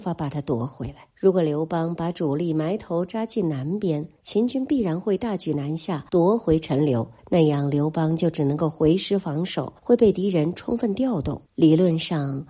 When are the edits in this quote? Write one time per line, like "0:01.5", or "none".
0:01.1
0:04.2
0:06.1
0:07.2
0:09.8
0:11.5